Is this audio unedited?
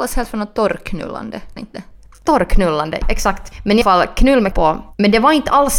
no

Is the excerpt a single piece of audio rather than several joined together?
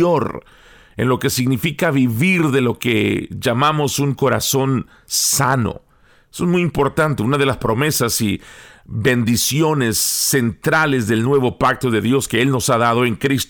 yes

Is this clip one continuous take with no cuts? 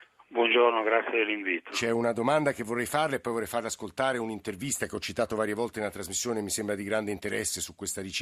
yes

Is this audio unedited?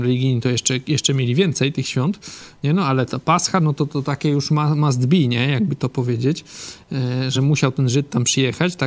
yes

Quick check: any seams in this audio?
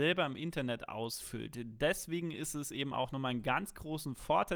no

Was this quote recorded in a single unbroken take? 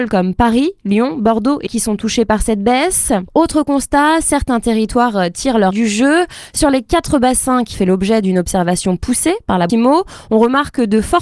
no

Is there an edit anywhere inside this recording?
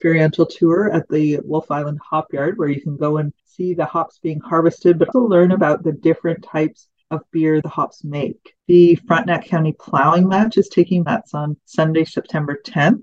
yes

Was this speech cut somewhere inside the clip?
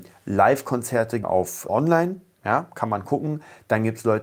yes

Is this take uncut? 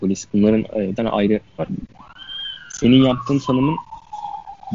no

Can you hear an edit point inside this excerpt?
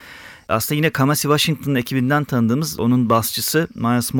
no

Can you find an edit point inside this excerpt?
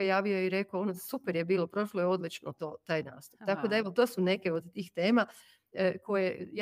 no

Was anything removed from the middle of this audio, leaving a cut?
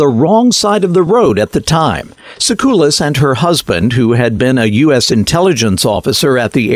no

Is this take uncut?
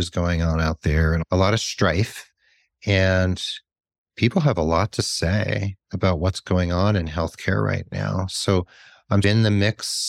yes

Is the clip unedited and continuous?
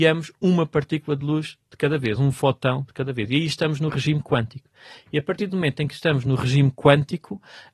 yes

